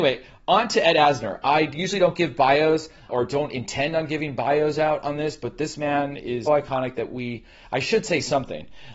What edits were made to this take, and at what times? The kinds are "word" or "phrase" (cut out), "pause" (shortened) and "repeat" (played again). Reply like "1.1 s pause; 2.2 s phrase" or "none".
6.5 s word